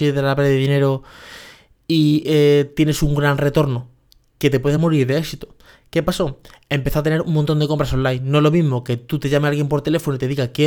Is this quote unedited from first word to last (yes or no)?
yes